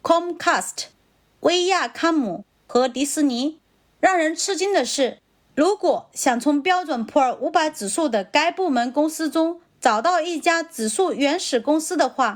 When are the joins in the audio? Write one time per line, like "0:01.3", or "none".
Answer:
none